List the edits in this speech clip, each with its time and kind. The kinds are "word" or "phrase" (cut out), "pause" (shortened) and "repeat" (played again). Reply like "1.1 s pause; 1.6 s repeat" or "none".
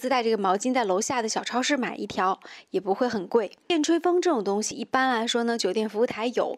3.6 s pause